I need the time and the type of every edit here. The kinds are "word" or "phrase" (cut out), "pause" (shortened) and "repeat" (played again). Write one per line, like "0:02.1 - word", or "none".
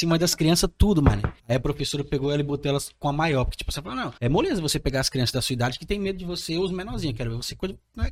0:01.4 - pause
0:04.2 - pause